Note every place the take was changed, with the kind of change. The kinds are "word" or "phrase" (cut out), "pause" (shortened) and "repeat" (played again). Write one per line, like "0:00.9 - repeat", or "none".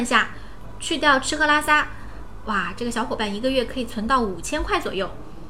none